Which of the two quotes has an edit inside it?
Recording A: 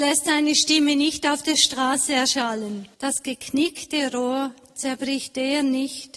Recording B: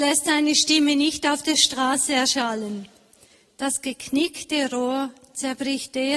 A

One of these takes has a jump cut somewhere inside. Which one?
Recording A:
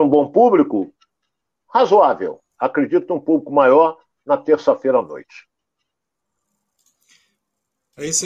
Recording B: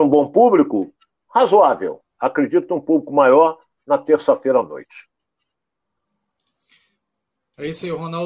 B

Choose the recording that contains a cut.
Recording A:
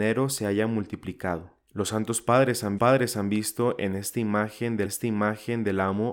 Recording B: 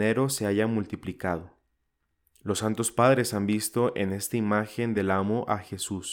A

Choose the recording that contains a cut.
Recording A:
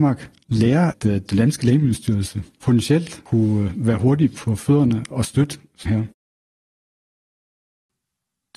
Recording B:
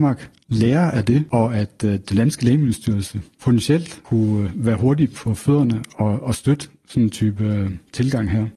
A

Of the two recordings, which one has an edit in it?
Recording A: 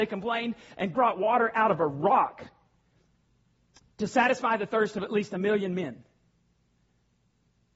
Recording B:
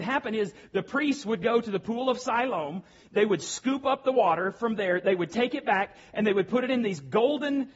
A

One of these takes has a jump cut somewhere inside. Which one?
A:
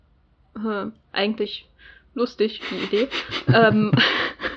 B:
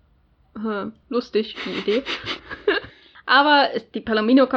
B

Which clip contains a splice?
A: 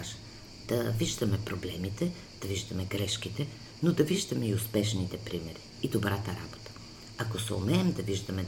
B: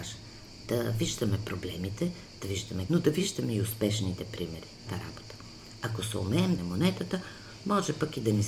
B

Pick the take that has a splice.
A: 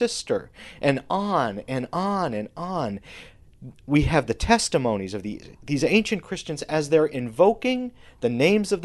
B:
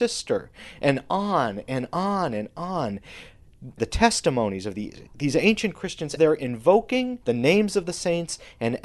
B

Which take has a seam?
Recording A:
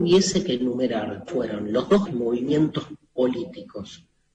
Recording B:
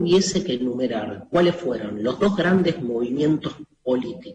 A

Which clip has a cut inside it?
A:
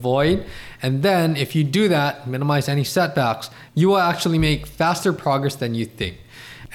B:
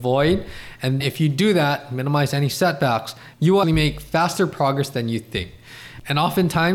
B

